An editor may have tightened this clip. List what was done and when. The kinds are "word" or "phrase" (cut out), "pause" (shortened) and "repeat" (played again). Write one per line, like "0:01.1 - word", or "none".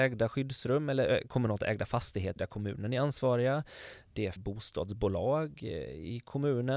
0:02.4 - phrase
0:04.4 - phrase